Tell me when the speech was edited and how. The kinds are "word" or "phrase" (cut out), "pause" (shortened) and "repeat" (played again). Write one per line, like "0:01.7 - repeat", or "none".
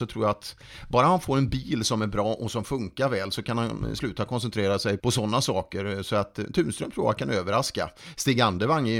0:05.0 - word